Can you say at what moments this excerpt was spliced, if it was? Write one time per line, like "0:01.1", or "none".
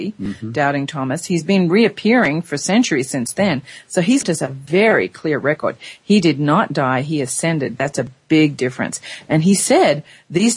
0:04.2